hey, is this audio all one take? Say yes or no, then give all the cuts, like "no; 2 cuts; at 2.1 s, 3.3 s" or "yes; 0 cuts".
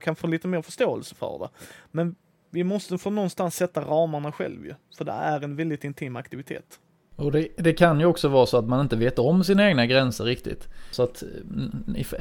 yes; 0 cuts